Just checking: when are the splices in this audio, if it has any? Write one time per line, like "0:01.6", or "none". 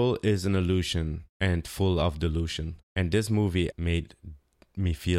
0:03.7